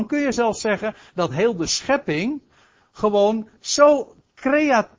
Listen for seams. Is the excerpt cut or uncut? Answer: uncut